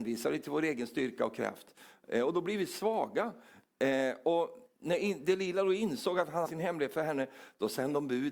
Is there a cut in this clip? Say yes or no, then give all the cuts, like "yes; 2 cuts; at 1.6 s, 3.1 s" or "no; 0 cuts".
yes; 1 cut; at 6.4 s